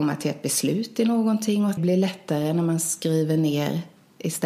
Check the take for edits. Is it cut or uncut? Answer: cut